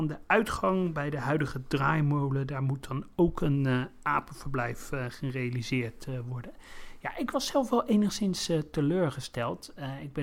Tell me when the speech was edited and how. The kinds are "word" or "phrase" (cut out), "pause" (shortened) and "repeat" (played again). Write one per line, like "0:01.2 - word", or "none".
none